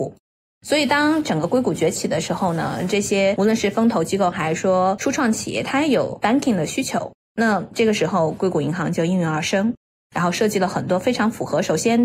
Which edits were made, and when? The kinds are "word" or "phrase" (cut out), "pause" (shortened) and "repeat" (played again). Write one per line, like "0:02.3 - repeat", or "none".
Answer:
none